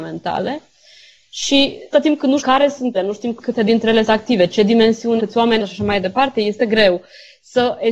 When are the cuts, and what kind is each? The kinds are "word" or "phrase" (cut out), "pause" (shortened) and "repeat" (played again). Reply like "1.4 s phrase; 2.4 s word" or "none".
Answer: 1.9 s word; 2.4 s word; 2.9 s word; 4.1 s word; 5.2 s word; 5.6 s word; 6.6 s word